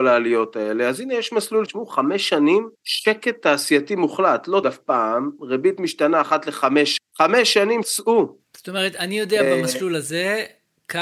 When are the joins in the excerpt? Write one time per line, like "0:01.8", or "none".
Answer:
0:01.7
0:02.7
0:04.6
0:07.0
0:07.8